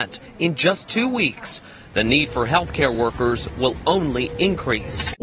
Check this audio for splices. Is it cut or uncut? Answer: uncut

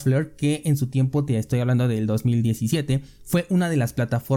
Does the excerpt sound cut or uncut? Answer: uncut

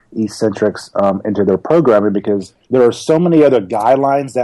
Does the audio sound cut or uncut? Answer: cut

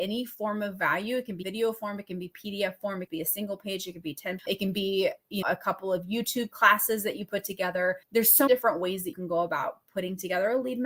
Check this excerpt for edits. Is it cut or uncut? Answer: cut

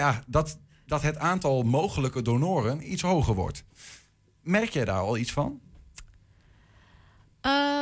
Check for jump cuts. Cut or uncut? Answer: uncut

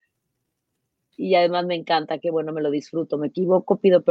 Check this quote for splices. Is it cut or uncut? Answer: uncut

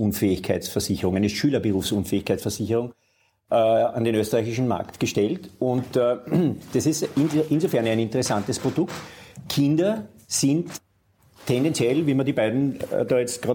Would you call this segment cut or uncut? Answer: uncut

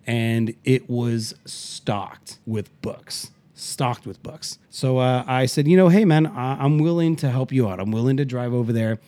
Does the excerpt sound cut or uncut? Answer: cut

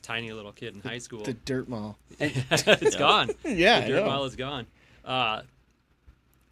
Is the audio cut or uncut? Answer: uncut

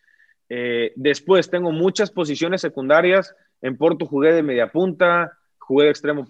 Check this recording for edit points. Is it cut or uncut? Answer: uncut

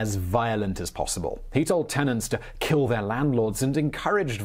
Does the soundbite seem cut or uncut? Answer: uncut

